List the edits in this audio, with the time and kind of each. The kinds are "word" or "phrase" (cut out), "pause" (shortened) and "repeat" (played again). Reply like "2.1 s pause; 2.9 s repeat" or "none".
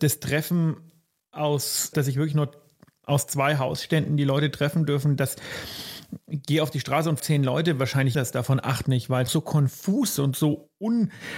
1.9 s word; 7.2 s word; 8.1 s word; 8.8 s word; 9.3 s word; 10.2 s word